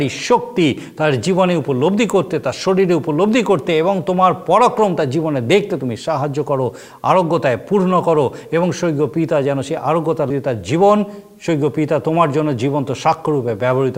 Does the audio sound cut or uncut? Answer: cut